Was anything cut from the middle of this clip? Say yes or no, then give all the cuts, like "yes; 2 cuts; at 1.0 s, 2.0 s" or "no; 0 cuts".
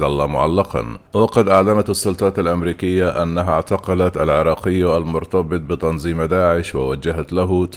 yes; 1 cut; at 1.1 s